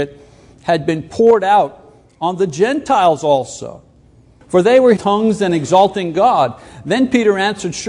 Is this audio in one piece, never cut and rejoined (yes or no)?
no